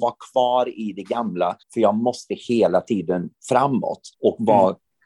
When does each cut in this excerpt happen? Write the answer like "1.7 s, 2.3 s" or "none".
1.6 s, 4.1 s